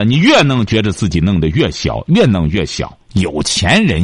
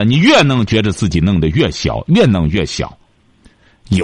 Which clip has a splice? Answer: first; 1 cut; at 3.0 s

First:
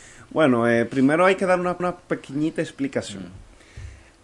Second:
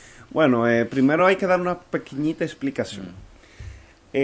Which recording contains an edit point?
first; 1 cut; at 1.8 s

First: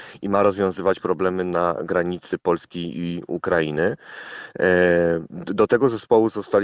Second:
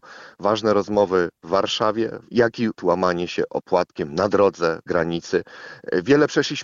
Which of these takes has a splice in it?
second; 3 cuts; at 2.2 s, 2.8 s, 4.9 s

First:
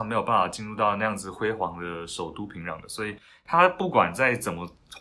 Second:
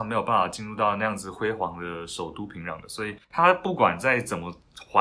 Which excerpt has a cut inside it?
second; 1 cut; at 3.2 s

